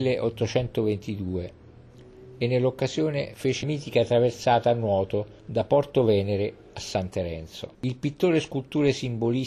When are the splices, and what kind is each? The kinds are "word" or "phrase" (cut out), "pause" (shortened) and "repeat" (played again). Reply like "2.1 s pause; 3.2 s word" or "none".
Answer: 3.6 s word; 5.4 s pause; 7.7 s pause